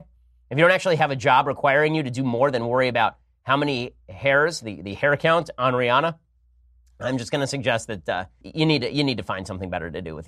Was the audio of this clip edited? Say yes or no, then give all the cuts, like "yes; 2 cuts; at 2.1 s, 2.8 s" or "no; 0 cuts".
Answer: yes; 1 cut; at 8.4 s